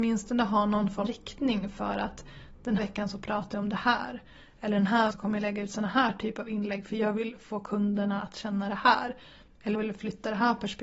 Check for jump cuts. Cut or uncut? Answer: cut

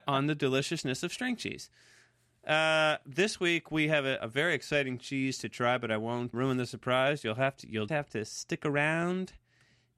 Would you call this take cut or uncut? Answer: cut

